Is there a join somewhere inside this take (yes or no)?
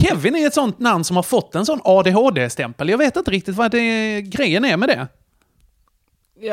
no